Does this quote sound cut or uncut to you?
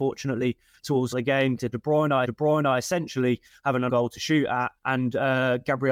cut